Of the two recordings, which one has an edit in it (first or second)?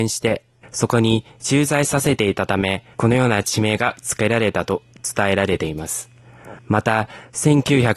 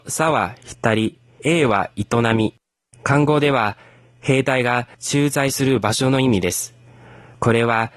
first